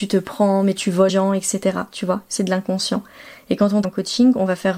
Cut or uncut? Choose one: cut